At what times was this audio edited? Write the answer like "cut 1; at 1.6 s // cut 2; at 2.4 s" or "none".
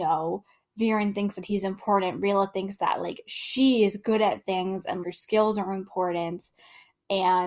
cut 1; at 5.0 s